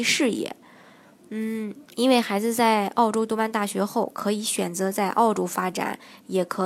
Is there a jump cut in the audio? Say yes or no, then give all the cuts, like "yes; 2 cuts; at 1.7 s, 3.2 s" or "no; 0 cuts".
yes; 1 cut; at 1.9 s